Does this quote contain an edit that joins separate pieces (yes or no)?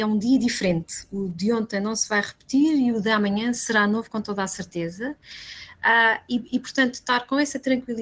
no